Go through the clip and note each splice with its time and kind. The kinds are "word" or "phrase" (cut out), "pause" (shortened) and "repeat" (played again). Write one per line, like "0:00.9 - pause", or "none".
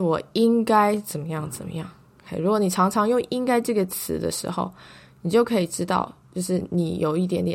none